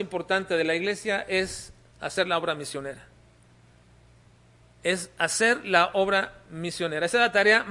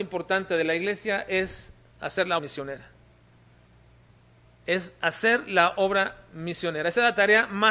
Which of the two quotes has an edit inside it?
second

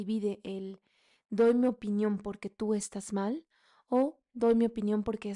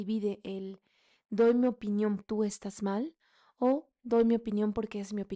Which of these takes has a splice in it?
second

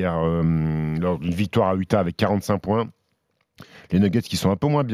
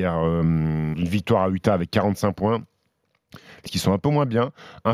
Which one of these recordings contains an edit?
second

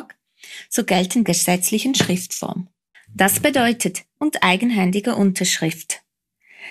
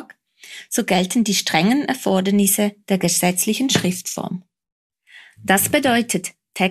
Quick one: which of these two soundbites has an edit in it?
first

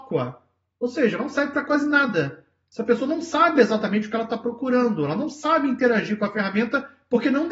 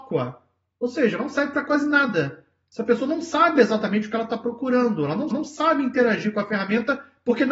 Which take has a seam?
second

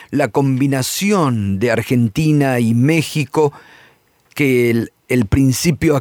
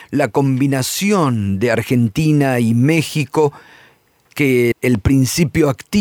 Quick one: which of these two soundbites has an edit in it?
second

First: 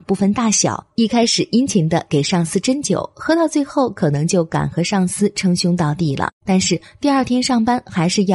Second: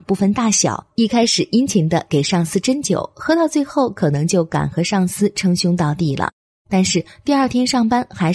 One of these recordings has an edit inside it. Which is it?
first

